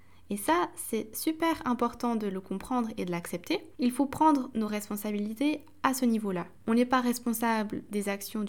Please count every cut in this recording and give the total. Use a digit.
2